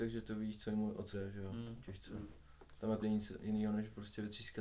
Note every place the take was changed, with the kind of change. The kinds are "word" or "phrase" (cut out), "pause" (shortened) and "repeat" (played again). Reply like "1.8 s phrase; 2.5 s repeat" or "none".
1.1 s word; 3.0 s word